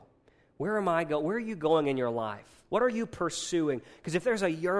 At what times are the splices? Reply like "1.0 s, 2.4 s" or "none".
2.6 s

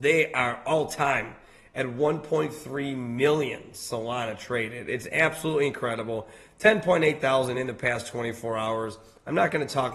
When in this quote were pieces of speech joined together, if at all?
none

